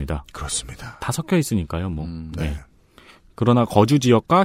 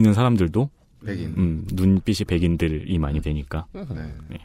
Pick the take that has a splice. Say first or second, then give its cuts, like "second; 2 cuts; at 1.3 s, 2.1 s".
second; 2 cuts; at 2.3 s, 3.2 s